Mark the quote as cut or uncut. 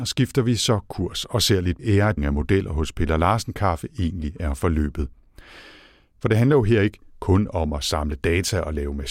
cut